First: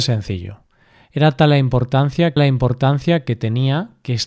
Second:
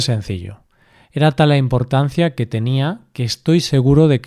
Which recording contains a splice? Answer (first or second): first